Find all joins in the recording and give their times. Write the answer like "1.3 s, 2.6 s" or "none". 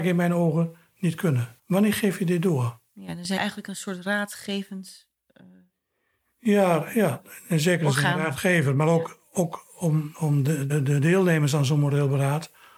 1.6 s, 3.4 s, 10.1 s, 10.7 s